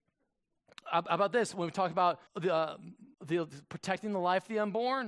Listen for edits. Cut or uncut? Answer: cut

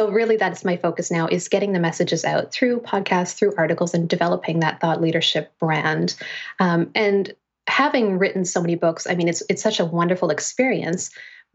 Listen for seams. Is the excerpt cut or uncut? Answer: uncut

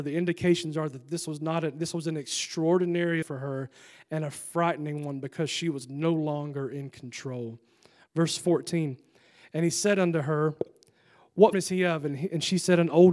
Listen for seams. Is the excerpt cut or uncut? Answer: cut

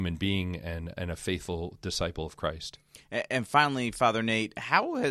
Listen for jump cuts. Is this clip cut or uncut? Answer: uncut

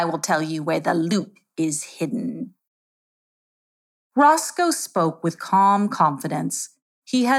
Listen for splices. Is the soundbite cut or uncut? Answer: uncut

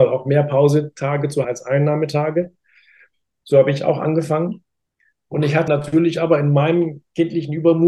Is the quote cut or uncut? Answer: cut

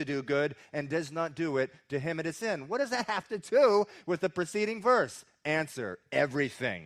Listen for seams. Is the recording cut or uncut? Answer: uncut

